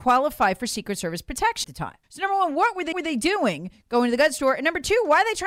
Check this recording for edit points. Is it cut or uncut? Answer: cut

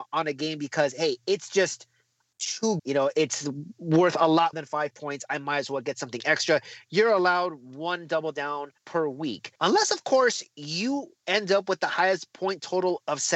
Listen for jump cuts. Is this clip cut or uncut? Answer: cut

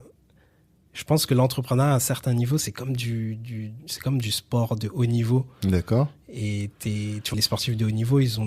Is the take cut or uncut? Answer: cut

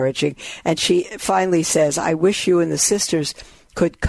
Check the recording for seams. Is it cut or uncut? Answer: uncut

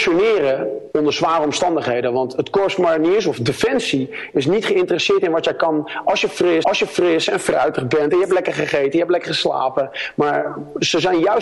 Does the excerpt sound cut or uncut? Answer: cut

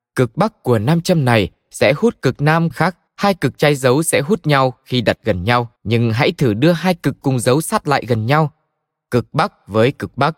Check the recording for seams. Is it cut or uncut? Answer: cut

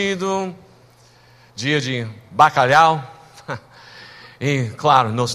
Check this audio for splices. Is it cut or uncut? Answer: uncut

